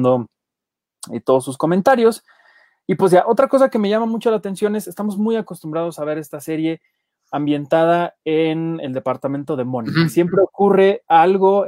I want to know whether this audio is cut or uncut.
uncut